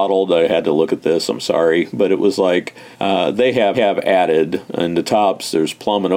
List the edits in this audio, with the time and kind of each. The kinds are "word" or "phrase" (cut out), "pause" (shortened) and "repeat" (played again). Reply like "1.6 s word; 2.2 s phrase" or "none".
2.9 s pause; 3.7 s repeat